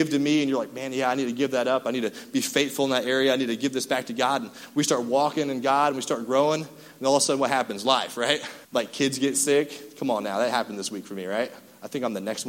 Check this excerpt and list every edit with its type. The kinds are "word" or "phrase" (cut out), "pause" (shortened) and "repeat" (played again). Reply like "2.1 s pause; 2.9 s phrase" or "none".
8.6 s pause